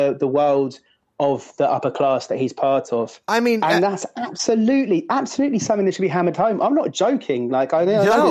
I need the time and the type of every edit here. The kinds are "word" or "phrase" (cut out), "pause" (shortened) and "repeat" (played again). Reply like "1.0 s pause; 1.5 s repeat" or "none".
3.2 s pause